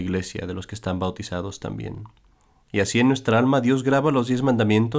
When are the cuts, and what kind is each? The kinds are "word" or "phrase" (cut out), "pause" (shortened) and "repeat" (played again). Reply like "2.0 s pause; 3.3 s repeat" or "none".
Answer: none